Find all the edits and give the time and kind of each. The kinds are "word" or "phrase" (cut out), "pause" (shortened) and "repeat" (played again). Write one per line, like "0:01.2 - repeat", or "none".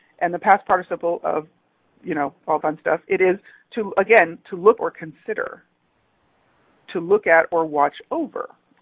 0:02.6 - word
0:04.8 - word